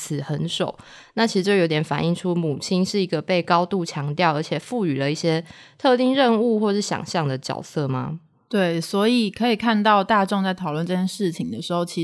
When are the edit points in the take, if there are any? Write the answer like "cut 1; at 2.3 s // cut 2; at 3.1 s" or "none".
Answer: none

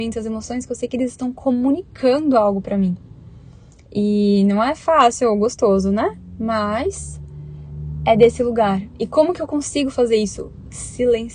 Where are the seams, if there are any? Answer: none

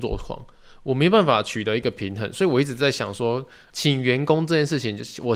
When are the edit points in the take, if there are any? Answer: none

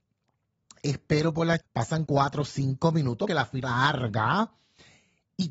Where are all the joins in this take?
cut 1; at 1.6 s // cut 2; at 2.1 s // cut 3; at 3.3 s // cut 4; at 3.6 s

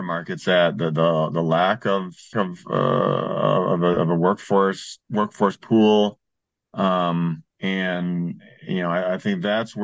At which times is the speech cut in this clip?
cut 1; at 2.3 s // cut 2; at 5.0 s // cut 3; at 7.5 s

